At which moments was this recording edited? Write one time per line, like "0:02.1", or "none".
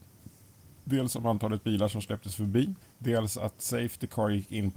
0:02.8